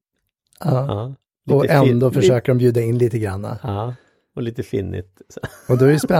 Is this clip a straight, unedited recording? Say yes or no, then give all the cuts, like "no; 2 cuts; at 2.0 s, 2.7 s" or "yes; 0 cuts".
yes; 0 cuts